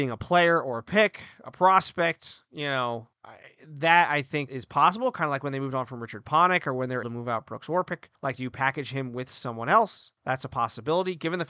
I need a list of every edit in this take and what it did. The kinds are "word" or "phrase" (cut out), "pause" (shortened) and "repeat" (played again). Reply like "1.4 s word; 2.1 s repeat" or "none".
3.1 s pause; 4.5 s word; 7.0 s word; 8.1 s pause; 10.2 s pause